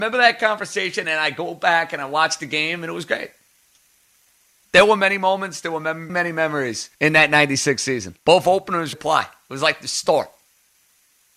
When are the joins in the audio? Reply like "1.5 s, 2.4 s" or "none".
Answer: 6.1 s, 6.9 s, 8.2 s, 8.9 s